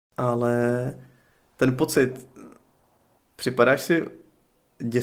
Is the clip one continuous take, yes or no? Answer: yes